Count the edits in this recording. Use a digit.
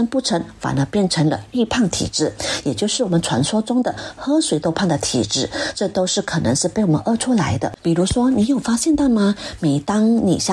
1